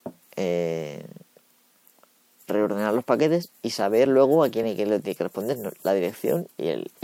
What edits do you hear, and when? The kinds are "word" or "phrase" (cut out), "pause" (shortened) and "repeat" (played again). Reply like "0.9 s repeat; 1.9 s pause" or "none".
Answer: none